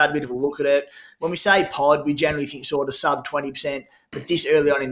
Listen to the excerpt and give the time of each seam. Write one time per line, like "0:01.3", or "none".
none

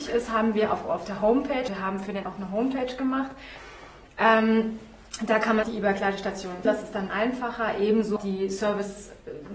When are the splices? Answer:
0:01.7
0:02.2
0:05.6
0:06.6
0:07.1
0:08.2

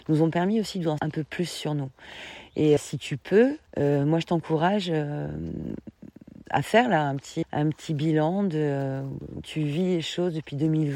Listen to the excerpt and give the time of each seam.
0:01.0
0:02.8
0:03.7
0:07.4
0:09.4

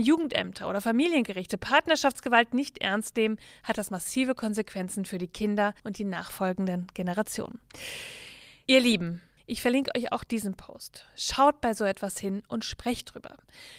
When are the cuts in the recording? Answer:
0:05.8
0:09.4

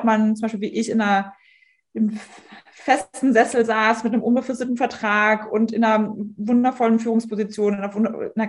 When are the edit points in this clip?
none

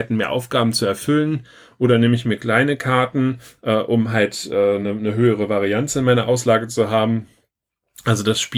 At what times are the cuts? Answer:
none

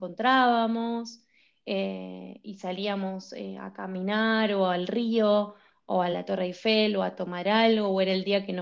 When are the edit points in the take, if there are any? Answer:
none

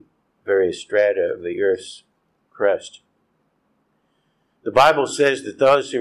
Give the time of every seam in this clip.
none

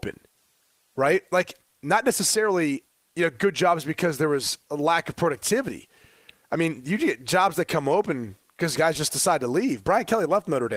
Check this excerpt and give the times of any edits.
none

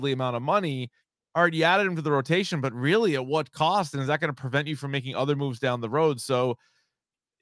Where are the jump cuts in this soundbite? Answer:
0:01.0

